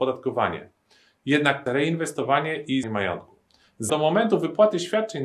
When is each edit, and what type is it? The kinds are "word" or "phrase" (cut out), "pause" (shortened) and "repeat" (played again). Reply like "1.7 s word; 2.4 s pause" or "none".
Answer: 1.7 s word; 2.8 s word; 3.9 s word